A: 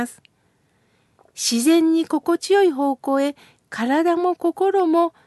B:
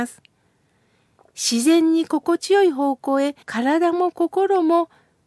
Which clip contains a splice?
B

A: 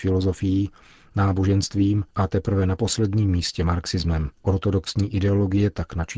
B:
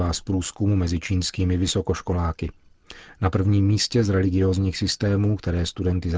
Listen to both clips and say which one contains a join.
A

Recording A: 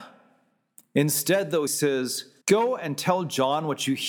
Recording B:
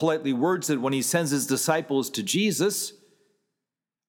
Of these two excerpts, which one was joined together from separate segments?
A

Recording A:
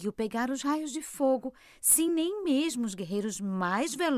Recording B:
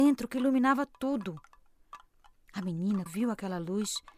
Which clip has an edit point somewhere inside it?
B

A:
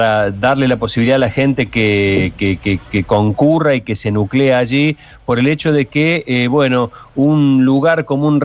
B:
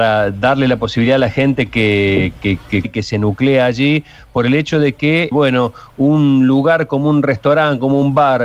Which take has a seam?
B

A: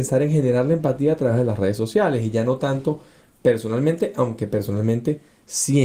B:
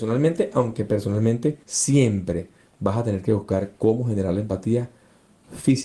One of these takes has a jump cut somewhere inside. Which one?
B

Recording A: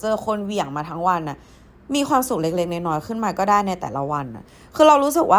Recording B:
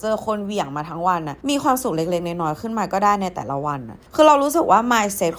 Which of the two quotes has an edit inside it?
B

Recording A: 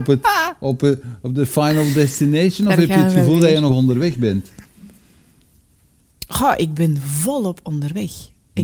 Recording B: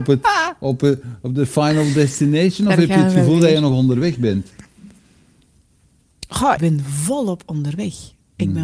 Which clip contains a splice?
B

